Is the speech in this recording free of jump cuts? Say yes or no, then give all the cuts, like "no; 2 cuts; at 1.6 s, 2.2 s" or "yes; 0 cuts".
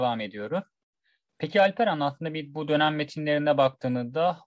yes; 0 cuts